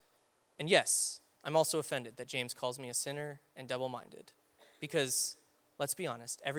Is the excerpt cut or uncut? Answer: uncut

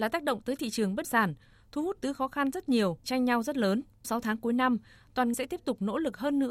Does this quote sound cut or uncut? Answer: cut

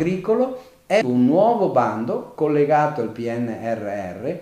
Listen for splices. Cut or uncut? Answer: cut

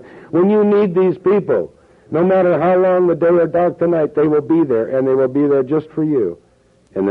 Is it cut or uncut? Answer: uncut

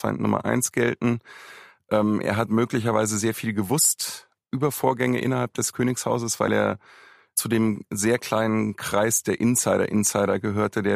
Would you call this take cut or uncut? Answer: uncut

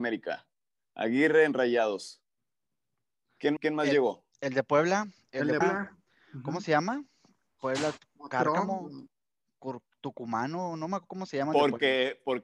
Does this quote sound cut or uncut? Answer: cut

